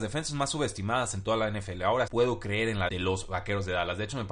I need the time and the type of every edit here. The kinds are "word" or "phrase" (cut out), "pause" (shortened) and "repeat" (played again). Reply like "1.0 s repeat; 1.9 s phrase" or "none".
2.1 s word; 2.9 s word